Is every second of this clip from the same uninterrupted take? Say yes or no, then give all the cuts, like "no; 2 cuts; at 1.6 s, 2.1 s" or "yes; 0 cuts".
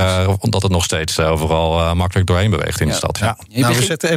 yes; 0 cuts